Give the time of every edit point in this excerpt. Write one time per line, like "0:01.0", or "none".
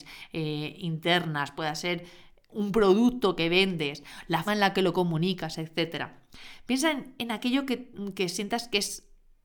0:04.5